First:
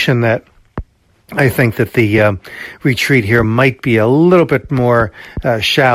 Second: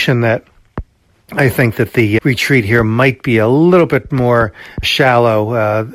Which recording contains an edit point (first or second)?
second